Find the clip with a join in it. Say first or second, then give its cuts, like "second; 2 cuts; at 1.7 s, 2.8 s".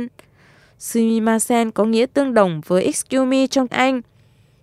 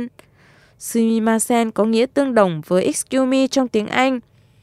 first; 1 cut; at 3.7 s